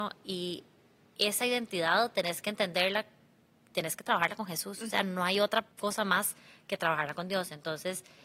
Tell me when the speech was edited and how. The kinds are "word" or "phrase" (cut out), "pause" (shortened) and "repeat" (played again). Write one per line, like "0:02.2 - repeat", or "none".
0:05.7 - pause